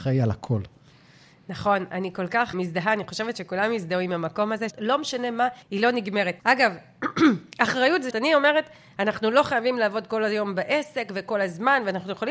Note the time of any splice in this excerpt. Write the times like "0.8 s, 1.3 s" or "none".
2.5 s, 4.7 s, 5.6 s, 6.4 s, 8.1 s